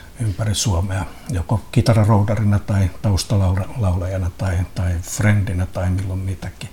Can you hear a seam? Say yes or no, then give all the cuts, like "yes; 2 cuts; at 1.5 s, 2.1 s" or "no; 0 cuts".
no; 0 cuts